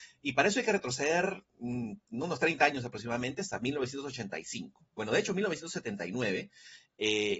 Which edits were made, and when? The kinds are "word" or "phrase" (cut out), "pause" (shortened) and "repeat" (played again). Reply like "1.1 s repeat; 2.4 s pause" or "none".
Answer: 1.5 s pause